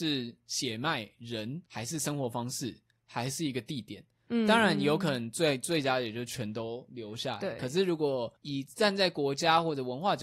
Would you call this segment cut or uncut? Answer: cut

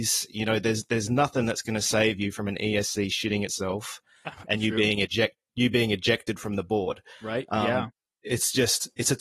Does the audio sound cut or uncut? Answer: uncut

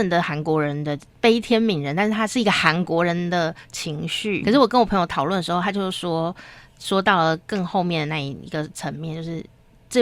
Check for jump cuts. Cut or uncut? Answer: cut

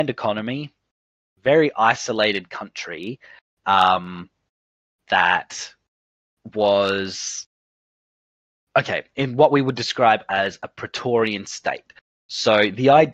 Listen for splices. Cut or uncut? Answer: uncut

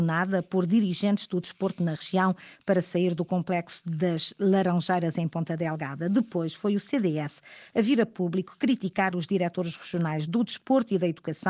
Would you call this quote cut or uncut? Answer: uncut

